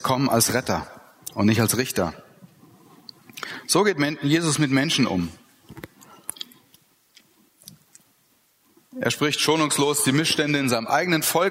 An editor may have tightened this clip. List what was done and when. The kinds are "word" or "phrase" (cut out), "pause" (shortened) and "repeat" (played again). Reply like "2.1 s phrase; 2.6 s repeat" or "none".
none